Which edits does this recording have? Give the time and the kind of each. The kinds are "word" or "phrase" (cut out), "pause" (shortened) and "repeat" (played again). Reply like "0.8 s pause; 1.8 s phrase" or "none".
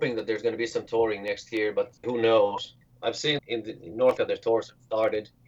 2.0 s word; 3.4 s word; 4.2 s word